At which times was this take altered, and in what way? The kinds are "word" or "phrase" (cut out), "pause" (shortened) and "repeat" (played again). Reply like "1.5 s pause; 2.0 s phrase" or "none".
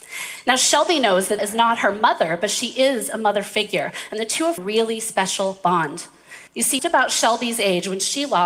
1.4 s word; 4.6 s phrase; 6.5 s pause; 6.8 s phrase